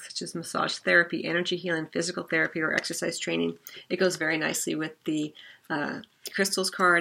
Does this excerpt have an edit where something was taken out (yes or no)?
no